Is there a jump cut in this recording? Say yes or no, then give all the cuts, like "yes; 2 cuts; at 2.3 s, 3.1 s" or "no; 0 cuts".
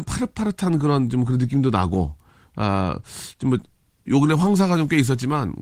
no; 0 cuts